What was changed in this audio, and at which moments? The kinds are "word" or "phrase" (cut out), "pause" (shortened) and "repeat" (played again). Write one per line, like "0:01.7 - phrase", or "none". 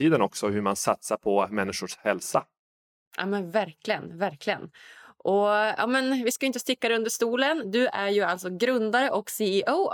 none